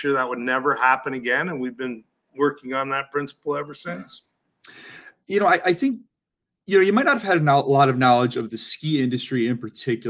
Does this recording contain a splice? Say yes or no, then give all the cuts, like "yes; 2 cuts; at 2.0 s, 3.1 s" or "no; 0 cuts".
no; 0 cuts